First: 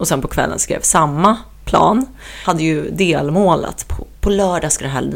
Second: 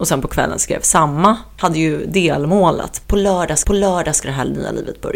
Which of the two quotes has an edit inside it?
second; 3 cuts; at 1.6 s, 3.0 s, 3.6 s

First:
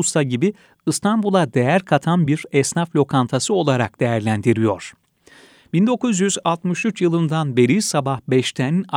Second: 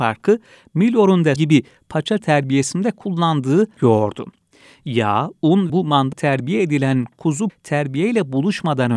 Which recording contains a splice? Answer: second; 6 cuts; at 1.4 s, 2.2 s, 3.8 s, 5.7 s, 6.1 s, 7.5 s

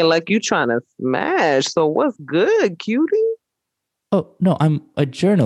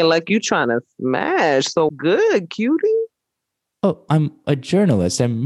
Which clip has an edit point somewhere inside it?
second; 2 cuts; at 1.9 s, 4.1 s

